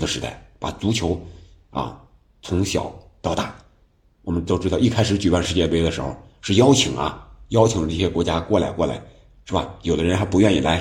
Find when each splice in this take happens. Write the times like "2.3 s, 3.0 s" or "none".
none